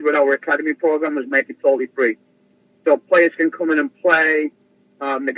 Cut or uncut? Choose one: uncut